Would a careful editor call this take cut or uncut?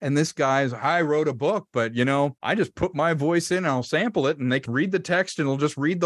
cut